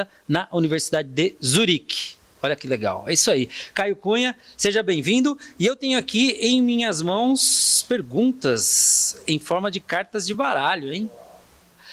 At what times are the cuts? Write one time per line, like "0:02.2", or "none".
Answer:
none